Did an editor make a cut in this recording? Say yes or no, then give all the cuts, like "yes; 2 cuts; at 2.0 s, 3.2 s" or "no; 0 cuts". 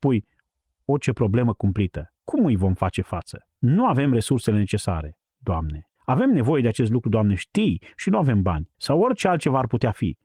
yes; 4 cuts; at 2.2 s, 3.6 s, 6.0 s, 8.7 s